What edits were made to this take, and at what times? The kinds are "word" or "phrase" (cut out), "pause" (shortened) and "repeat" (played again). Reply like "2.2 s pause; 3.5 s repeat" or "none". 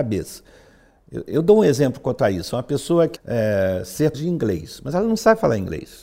3.2 s word; 4.1 s word